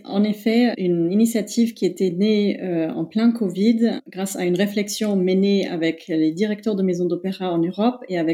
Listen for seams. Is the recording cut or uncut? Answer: uncut